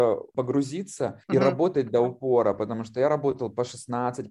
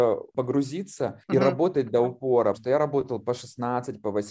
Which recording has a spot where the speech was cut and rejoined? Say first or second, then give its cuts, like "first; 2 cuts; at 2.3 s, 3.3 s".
second; 1 cut; at 2.5 s